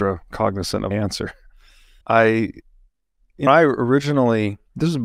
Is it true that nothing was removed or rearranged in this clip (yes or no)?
no